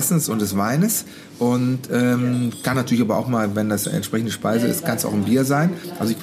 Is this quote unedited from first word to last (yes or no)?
yes